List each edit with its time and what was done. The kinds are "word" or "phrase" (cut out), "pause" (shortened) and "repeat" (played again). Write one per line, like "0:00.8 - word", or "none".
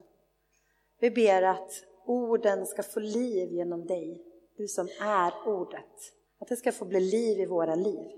0:06.3 - pause